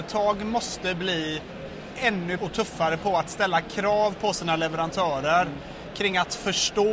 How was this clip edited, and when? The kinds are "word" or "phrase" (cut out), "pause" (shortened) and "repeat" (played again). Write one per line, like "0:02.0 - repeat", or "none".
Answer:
0:02.4 - word